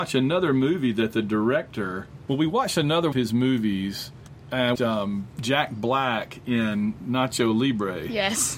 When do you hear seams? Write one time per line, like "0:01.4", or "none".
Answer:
0:03.1
0:04.7

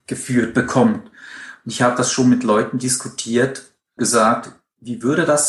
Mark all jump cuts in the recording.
0:04.0

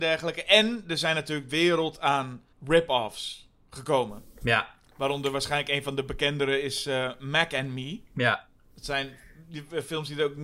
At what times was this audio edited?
0:01.5
0:02.5
0:08.1

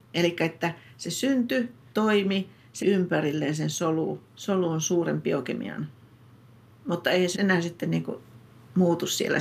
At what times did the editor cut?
0:01.9
0:02.8
0:04.3
0:07.3

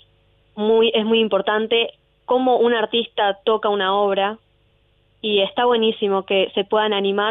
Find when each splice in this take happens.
none

